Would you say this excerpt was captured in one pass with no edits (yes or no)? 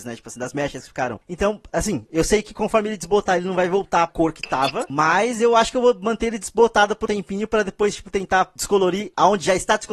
no